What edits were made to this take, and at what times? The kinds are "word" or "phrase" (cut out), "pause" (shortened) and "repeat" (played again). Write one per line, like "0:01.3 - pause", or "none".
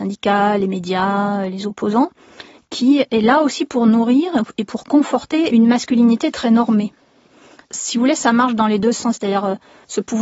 none